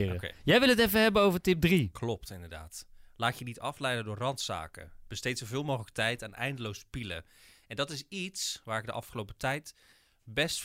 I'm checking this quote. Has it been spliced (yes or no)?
no